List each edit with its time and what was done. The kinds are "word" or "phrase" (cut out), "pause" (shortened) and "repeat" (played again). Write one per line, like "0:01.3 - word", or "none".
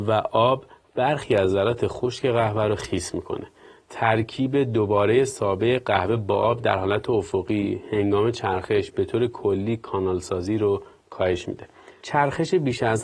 none